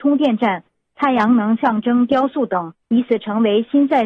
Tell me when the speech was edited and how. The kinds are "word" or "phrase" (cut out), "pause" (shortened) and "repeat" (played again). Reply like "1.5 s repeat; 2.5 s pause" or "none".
2.8 s pause